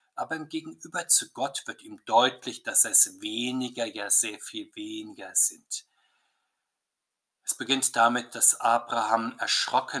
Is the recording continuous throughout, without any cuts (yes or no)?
yes